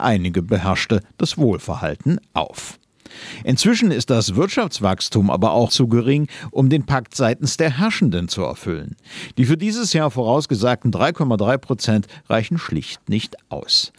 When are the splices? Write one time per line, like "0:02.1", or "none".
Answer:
0:05.7